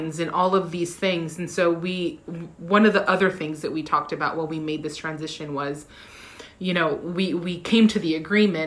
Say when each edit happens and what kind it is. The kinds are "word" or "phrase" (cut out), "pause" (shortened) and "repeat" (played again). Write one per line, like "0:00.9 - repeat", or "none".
none